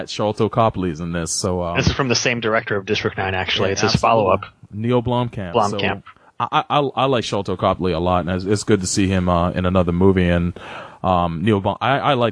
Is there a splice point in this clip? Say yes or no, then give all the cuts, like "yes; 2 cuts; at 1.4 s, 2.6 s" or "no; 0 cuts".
no; 0 cuts